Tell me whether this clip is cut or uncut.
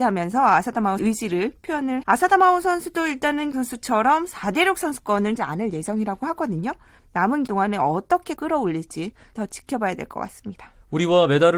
cut